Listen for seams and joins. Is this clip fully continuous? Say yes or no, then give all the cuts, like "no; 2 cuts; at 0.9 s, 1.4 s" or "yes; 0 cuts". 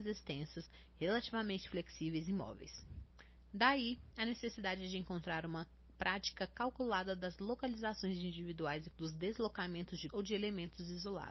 no; 2 cuts; at 8.9 s, 10.1 s